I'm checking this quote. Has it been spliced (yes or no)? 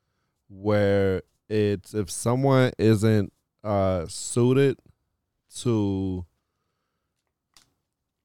no